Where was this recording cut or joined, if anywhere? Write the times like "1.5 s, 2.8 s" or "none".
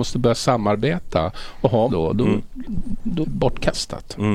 1.9 s, 3.2 s